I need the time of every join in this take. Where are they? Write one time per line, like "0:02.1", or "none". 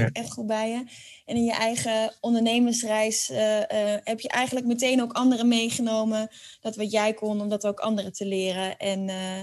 none